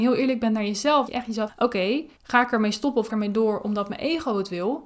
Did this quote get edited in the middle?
yes; 4 cuts; at 1.1 s, 1.5 s, 2.2 s, 3.1 s

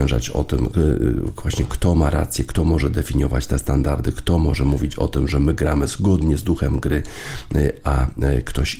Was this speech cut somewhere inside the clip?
no; 0 cuts

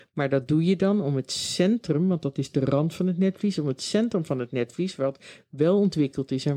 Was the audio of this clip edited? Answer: no; 0 cuts

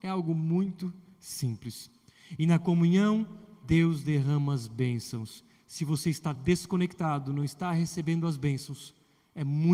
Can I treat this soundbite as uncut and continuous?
yes; 0 cuts

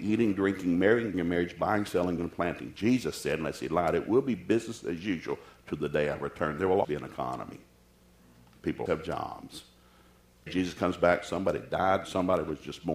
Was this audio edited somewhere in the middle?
yes; 5 cuts; at 1.1 s, 2.2 s, 6.8 s, 8.9 s, 10.5 s

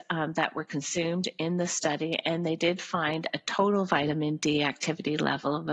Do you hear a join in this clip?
no; 0 cuts

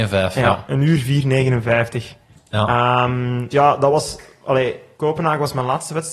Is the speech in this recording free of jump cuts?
no; 1 cut; at 3.5 s

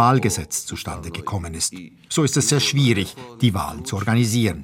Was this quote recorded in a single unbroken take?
yes; 0 cuts

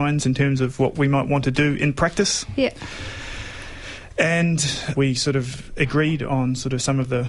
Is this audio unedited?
no; 1 cut; at 4.9 s

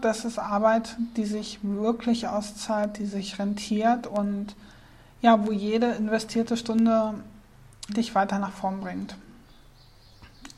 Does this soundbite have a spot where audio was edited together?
yes; 1 cut; at 7.9 s

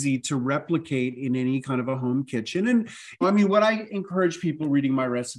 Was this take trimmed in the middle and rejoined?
yes; 1 cut; at 3.2 s

